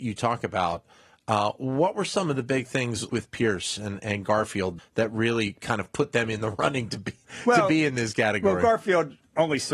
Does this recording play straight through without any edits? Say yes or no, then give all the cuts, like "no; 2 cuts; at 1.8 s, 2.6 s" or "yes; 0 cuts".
no; 3 cuts; at 3.1 s, 4.0 s, 4.8 s